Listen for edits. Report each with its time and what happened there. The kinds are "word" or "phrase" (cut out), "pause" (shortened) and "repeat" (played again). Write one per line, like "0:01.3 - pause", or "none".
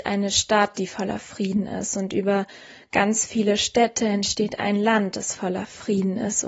none